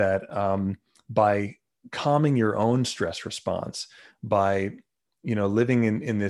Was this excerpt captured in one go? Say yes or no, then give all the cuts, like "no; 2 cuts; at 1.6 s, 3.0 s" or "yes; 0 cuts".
yes; 0 cuts